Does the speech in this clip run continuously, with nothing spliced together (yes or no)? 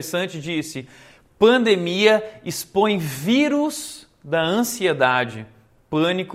yes